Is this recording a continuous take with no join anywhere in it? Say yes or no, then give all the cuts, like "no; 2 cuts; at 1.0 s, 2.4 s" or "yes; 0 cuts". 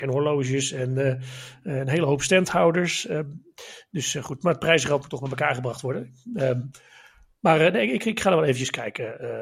yes; 0 cuts